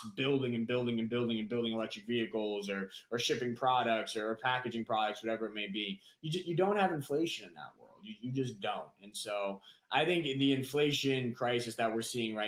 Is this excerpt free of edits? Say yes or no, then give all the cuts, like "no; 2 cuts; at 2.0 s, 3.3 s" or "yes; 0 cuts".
yes; 0 cuts